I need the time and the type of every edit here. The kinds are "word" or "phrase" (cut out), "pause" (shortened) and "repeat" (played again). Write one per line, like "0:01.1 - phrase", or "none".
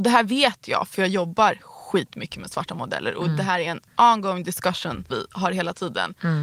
0:03.9 - pause
0:05.1 - word